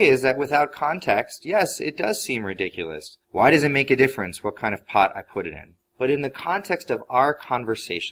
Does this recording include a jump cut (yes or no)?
yes